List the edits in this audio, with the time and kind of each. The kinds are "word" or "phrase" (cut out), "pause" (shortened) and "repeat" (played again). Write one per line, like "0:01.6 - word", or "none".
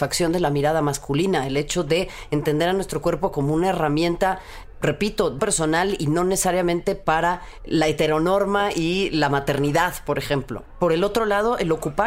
0:05.4 - word